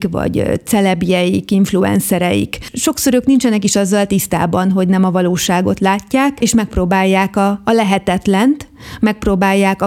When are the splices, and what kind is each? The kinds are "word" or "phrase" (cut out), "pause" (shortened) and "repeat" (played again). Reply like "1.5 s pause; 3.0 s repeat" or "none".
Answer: none